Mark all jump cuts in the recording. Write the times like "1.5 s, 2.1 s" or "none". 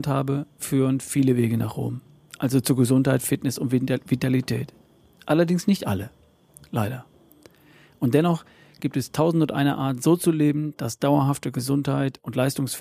none